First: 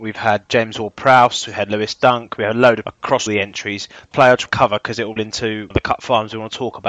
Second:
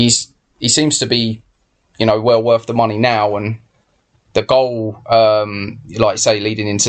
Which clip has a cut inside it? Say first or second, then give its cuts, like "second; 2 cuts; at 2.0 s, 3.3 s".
first; 6 cuts; at 2.8 s, 3.3 s, 4.1 s, 4.5 s, 5.2 s, 5.7 s